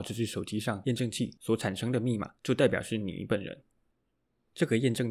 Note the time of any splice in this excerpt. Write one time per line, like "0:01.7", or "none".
0:02.4